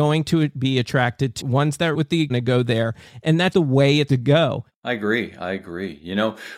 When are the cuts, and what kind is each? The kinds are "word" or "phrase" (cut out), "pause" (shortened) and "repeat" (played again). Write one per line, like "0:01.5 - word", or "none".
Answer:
0:01.4 - phrase
0:01.9 - word
0:02.3 - phrase
0:03.5 - word
0:04.1 - word